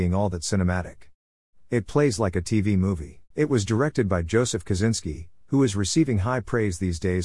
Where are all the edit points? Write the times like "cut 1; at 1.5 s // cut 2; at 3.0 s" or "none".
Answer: cut 1; at 3.3 s